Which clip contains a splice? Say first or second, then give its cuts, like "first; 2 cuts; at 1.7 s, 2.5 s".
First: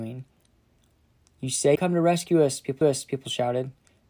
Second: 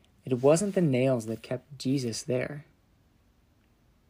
first; 2 cuts; at 1.8 s, 2.8 s